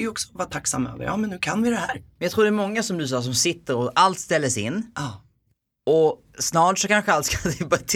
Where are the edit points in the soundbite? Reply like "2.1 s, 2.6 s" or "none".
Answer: none